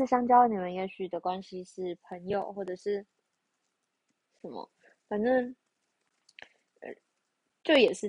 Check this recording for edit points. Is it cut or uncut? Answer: uncut